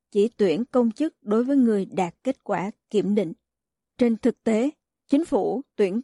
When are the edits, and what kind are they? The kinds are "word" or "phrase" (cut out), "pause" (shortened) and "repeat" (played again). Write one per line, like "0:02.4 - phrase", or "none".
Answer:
none